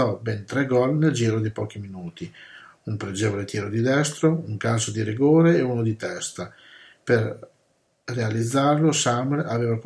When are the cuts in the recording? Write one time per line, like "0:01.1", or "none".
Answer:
none